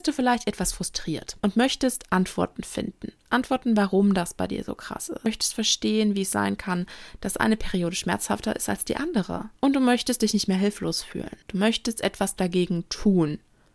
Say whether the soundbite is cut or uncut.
cut